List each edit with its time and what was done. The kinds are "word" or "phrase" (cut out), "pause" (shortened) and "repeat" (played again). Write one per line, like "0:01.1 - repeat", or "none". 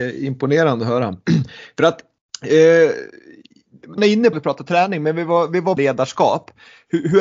0:04.0 - word
0:04.3 - phrase
0:05.8 - word